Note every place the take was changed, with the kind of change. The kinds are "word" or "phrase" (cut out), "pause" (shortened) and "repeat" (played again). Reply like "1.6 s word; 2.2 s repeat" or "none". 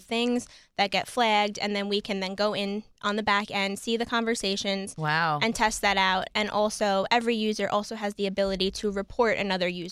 none